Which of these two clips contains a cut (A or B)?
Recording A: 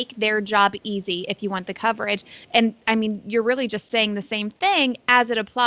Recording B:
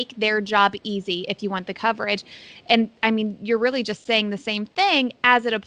A